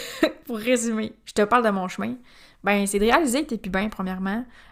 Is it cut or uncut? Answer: uncut